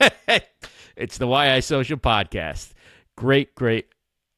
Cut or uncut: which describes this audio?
uncut